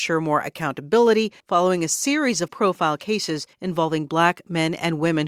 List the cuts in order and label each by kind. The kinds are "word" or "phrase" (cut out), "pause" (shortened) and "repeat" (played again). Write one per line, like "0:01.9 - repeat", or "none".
0:01.4 - pause
0:02.5 - word
0:03.5 - pause